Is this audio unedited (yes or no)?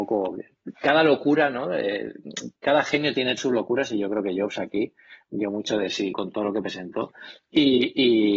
no